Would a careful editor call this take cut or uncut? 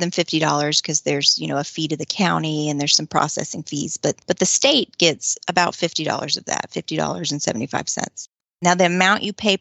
cut